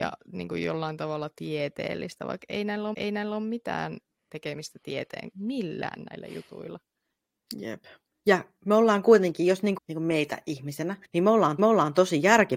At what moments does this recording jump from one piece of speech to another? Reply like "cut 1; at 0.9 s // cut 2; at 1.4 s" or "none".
cut 1; at 2.9 s // cut 2; at 5.3 s // cut 3; at 9.8 s // cut 4; at 11.0 s // cut 5; at 11.6 s